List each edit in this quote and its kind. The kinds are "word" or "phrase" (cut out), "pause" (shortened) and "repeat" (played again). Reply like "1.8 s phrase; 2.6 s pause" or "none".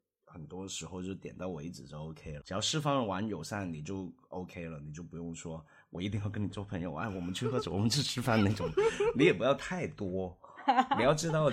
2.4 s word